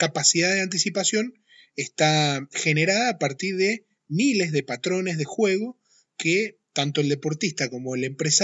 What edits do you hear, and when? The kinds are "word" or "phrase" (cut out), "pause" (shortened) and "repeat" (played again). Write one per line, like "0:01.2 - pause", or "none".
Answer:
none

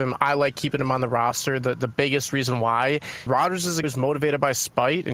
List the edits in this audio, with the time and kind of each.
0:03.3 - word
0:03.8 - word

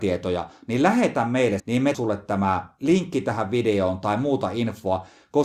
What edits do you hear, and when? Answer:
0:01.6 - word
0:01.9 - word

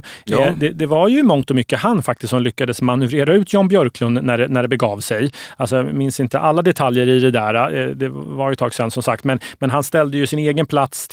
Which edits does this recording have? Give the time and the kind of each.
none

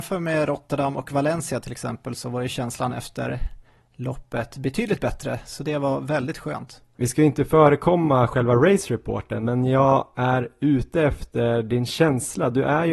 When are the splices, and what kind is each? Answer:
none

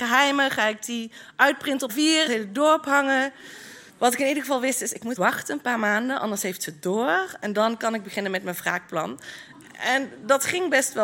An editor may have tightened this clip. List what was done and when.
0:01.9 - word
0:02.3 - phrase
0:03.9 - pause
0:05.2 - word

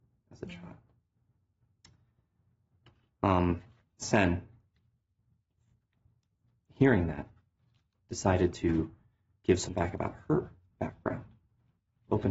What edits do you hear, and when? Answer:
0:09.7 - word

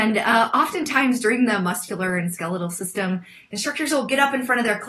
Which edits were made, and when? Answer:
none

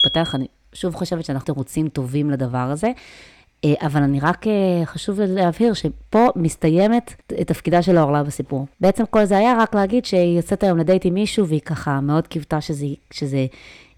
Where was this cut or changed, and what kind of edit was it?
0:01.4 - phrase
0:07.2 - pause
0:08.7 - pause

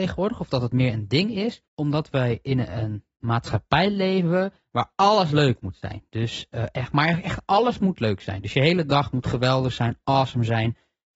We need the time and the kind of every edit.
0:01.6 - pause
0:03.2 - pause

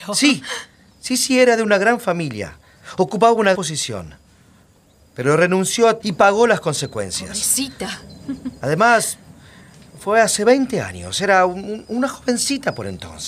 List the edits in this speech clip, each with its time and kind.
0:03.5 - word
0:06.0 - word

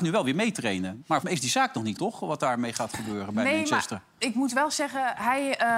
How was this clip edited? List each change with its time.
0:01.2 - word
0:02.0 - word

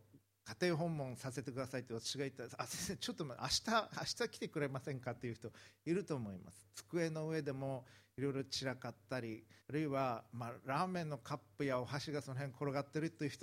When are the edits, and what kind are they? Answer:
0:09.6 - pause

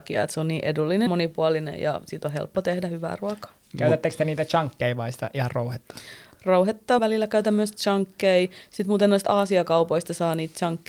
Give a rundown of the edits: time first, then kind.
0:01.1 - word
0:07.0 - word

